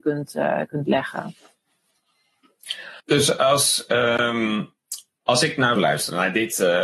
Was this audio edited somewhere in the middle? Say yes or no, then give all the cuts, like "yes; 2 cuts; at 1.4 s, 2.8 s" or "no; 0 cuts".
yes; 2 cuts; at 3.0 s, 5.8 s